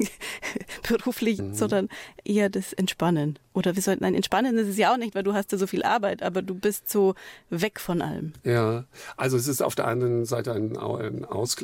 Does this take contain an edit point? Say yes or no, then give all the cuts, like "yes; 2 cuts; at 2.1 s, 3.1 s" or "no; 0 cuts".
yes; 1 cut; at 1.4 s